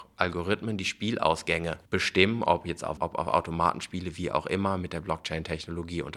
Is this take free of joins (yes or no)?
no